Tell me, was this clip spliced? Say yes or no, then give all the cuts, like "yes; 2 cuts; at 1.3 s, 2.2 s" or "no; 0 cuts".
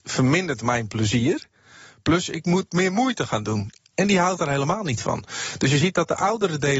no; 0 cuts